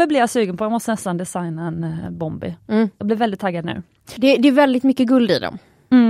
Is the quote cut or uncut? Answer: uncut